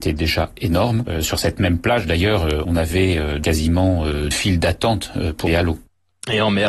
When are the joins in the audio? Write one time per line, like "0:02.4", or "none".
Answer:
0:02.6
0:04.3
0:05.5